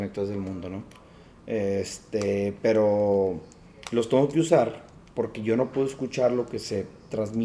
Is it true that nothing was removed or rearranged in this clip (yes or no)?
yes